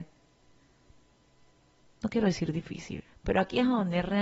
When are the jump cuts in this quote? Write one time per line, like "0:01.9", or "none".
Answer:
0:03.1